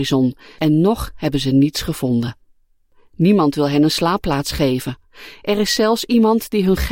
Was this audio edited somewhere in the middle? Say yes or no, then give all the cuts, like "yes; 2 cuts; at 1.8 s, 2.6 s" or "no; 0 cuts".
no; 0 cuts